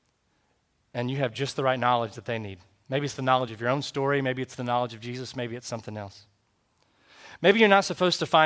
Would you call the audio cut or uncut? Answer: uncut